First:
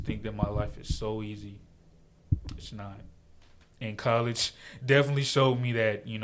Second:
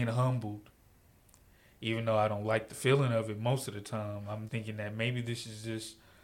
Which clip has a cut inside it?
second; 1 cut; at 4.5 s

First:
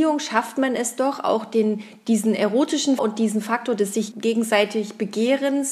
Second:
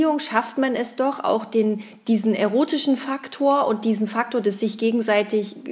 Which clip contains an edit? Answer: first; 2 cuts; at 3.0 s, 4.1 s

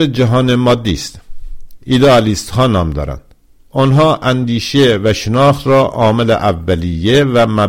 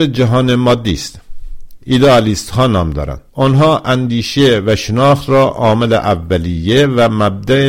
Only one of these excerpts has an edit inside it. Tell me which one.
second; 1 cut; at 3.3 s

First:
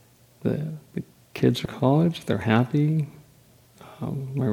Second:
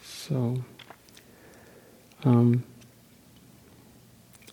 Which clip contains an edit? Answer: first; 2 cuts; at 1.2 s, 1.7 s

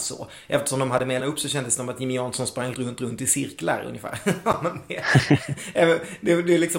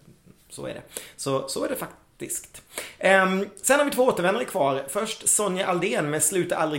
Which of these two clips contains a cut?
first; 2 cuts; at 1.2 s, 2.7 s

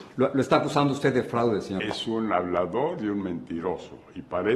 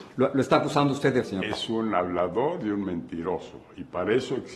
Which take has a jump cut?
second; 1 cut; at 1.2 s

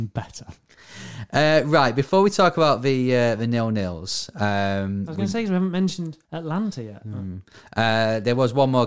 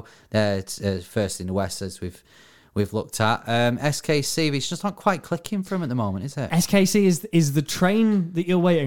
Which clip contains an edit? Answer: first; 1 cut; at 6.2 s

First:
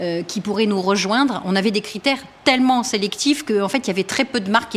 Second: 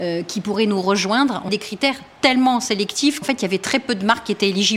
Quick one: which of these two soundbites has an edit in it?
second; 2 cuts; at 1.5 s, 3.2 s

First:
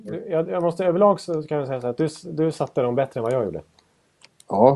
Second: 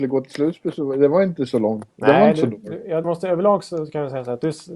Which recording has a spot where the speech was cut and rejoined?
second; 1 cut; at 3.0 s

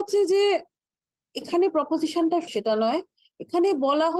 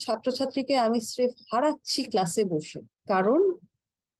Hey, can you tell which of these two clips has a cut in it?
first; 1 cut; at 2.5 s

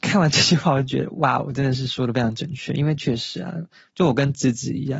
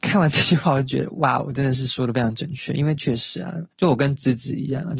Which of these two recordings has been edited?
second; 1 cut; at 3.7 s

